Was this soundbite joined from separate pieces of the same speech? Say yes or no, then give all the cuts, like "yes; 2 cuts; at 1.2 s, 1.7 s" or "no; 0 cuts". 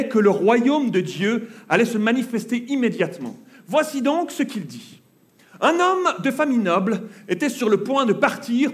no; 0 cuts